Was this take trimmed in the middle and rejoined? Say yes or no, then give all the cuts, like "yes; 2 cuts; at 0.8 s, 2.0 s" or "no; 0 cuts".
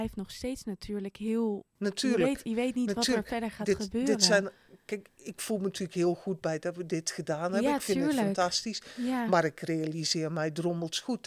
yes; 1 cut; at 1.7 s